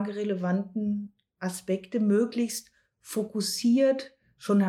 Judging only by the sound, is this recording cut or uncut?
uncut